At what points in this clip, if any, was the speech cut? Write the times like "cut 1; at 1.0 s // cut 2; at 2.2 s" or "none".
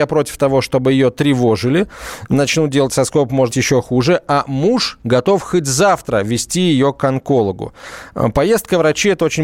cut 1; at 3.5 s